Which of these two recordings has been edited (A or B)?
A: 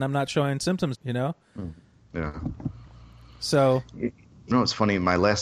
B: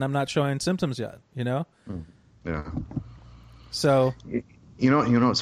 A